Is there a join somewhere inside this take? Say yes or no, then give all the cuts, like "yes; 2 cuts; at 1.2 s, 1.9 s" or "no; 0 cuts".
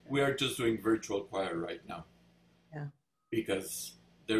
no; 0 cuts